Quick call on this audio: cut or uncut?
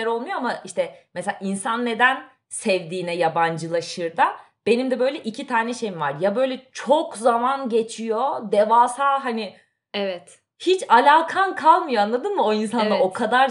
uncut